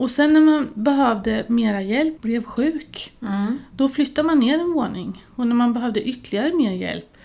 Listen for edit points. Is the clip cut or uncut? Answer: cut